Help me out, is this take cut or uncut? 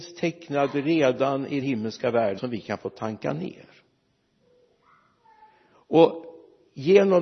cut